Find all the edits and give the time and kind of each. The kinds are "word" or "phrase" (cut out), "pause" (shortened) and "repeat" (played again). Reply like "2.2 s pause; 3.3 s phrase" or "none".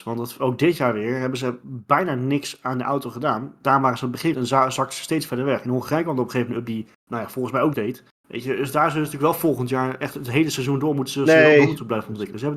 4.3 s word; 6.7 s word; 7.7 s word